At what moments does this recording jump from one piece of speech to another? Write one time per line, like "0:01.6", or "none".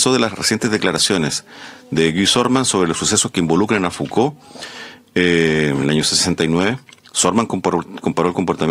none